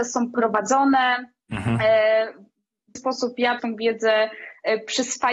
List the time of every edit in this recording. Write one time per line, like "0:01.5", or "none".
0:03.0
0:03.6